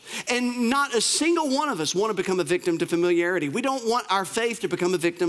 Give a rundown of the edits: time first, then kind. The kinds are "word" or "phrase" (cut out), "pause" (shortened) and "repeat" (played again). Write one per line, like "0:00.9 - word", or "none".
none